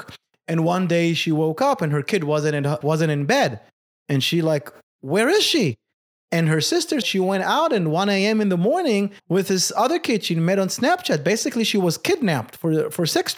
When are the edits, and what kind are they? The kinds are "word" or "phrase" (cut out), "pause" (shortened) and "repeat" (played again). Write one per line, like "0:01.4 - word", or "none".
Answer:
0:02.8 - word
0:07.0 - word
0:09.2 - pause